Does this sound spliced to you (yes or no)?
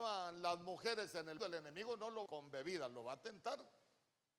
yes